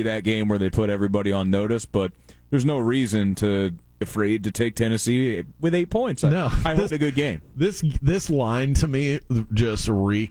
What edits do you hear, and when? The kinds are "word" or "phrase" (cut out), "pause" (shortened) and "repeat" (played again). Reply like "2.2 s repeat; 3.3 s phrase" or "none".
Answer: 4.0 s word; 6.9 s phrase